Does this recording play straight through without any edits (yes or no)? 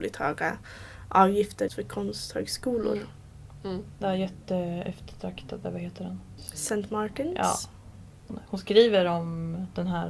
no